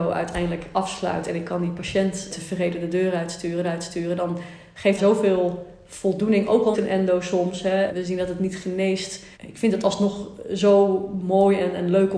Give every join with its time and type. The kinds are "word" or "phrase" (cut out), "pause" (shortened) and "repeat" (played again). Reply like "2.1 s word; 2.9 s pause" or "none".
2.3 s word; 3.6 s repeat; 5.0 s phrase; 6.7 s word; 7.9 s word; 9.3 s pause